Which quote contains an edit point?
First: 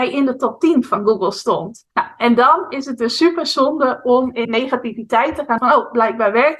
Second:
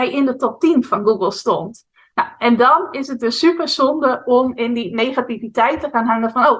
first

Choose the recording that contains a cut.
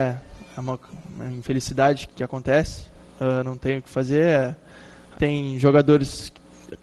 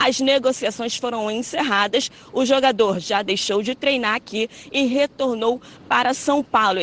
first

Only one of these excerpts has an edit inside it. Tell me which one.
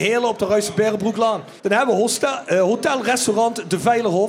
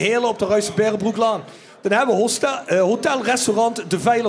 first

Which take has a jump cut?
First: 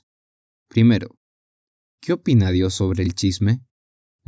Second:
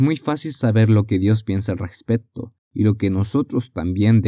second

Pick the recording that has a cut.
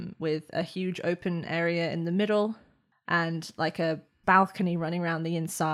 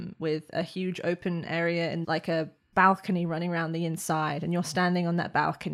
second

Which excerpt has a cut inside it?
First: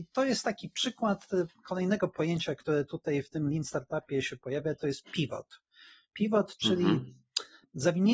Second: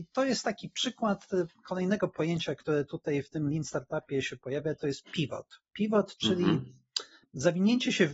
second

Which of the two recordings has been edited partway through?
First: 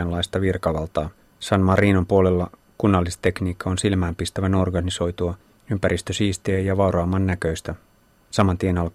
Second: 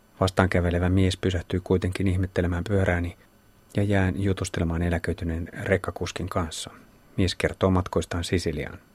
first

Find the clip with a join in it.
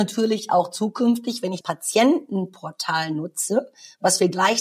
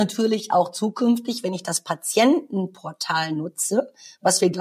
first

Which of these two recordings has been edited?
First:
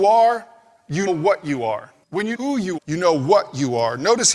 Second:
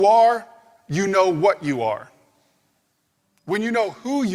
first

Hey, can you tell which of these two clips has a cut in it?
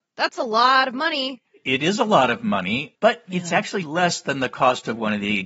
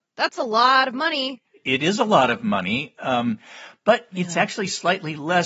first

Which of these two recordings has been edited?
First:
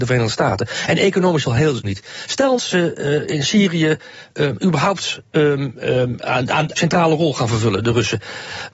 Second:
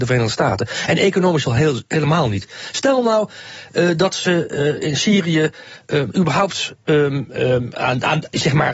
first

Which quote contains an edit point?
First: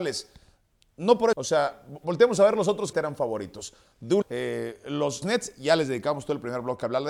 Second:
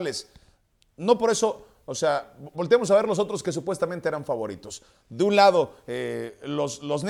first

